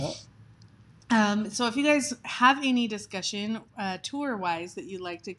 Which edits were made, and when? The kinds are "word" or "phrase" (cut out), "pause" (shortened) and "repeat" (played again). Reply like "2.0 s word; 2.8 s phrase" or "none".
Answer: 3.7 s pause